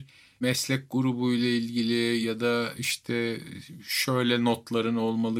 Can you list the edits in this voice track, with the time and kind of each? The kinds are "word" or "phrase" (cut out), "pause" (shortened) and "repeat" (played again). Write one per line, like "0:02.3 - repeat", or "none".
none